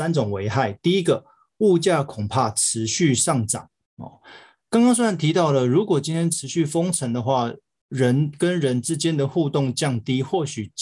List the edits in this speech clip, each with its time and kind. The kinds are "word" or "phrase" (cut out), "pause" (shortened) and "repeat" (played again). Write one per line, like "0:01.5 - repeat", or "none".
none